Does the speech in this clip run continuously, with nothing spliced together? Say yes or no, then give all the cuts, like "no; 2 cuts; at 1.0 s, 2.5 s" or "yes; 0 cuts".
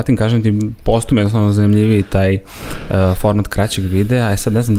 yes; 0 cuts